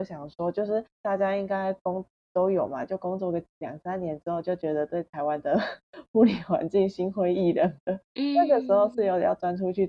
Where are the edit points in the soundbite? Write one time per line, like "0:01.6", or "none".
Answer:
0:00.9
0:03.5
0:08.1